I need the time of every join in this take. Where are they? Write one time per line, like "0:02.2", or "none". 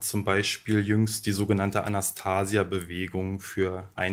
none